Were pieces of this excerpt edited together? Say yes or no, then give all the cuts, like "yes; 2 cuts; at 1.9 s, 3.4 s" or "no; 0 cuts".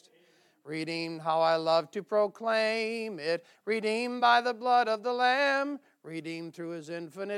no; 0 cuts